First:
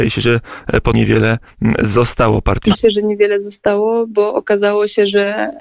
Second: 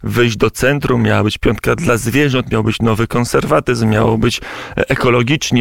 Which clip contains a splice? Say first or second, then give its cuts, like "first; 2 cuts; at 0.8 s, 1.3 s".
first; 2 cuts; at 0.9 s, 2.7 s